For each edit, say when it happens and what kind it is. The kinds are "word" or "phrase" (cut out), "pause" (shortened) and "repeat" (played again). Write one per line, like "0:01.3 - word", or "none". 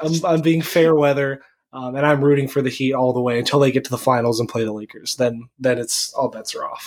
none